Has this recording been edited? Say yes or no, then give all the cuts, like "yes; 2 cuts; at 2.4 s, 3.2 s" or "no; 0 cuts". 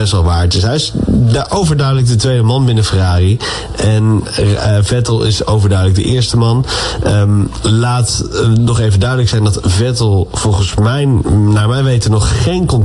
no; 0 cuts